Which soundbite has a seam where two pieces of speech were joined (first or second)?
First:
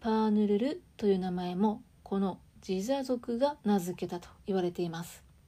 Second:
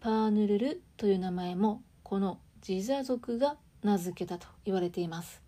first